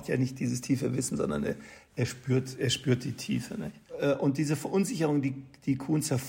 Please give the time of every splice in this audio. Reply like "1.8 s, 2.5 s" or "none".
none